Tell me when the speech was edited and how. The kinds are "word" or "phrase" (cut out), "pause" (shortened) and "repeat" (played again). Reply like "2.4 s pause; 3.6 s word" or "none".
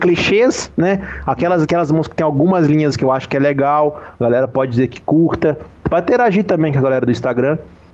1.7 s word; 2.9 s word